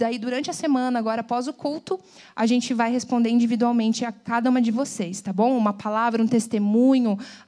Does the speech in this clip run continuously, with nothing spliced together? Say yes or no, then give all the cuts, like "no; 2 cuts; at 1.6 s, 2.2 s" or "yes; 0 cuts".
yes; 0 cuts